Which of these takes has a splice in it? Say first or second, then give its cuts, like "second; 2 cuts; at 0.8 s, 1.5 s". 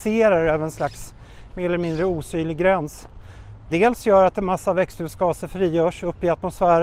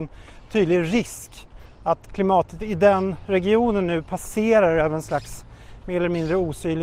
first; 1 cut; at 3.7 s